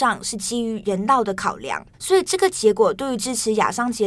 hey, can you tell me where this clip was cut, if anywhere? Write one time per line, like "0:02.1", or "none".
0:01.9